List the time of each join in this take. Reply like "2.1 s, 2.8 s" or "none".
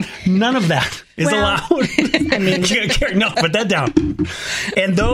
3.3 s